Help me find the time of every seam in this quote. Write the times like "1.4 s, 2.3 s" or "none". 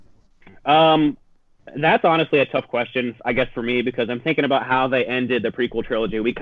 none